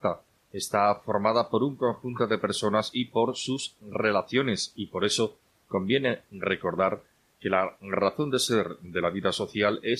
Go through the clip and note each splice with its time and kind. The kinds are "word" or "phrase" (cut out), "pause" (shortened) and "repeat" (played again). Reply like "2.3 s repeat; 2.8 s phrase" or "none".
none